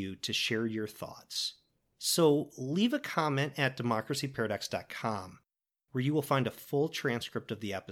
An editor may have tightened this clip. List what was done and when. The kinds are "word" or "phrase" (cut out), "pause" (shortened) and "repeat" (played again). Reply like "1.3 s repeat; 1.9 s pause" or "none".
1.8 s pause

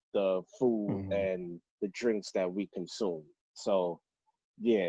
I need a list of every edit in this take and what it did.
1.7 s pause; 3.4 s pause

